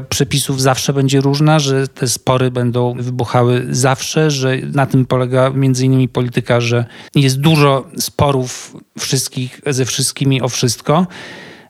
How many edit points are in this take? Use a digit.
1